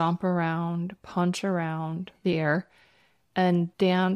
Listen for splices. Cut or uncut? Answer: uncut